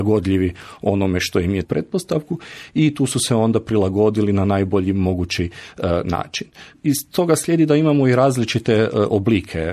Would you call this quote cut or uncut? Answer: cut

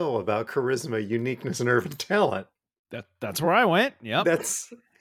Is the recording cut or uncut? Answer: uncut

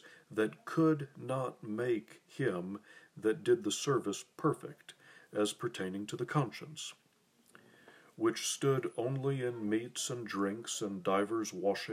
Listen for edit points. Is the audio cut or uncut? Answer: uncut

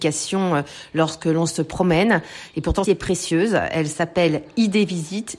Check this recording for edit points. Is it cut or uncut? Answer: cut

